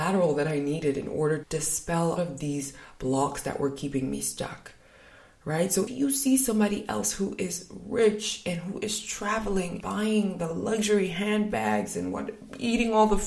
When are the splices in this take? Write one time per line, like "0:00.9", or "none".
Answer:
0:01.4
0:02.2
0:05.9
0:09.8

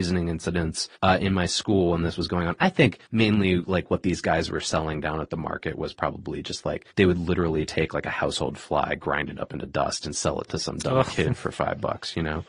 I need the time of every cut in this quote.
0:01.0
0:03.1
0:06.9

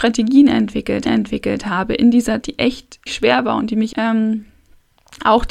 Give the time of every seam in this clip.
0:01.1
0:02.4
0:03.1
0:03.9

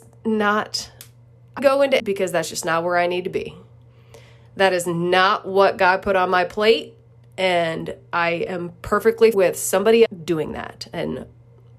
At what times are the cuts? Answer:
0:01.6
0:02.0
0:09.3
0:10.1

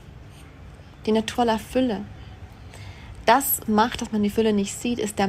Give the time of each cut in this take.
0:01.3
0:03.7

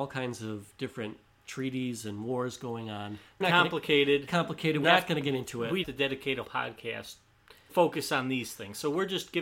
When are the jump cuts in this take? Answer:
0:03.4
0:04.3
0:04.8
0:05.8
0:06.4
0:07.7

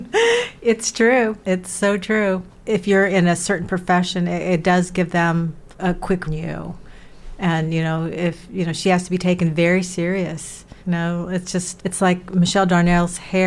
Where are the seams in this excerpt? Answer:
0:01.4
0:02.5
0:05.7
0:06.3
0:10.8
0:11.8

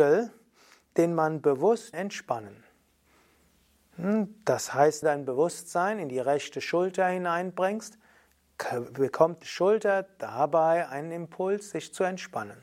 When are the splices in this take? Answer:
0:01.9
0:05.0
0:09.4

